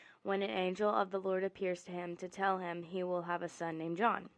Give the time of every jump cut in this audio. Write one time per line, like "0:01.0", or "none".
none